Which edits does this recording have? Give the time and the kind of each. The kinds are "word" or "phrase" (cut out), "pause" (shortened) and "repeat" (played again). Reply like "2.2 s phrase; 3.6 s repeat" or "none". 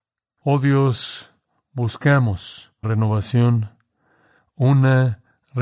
2.8 s word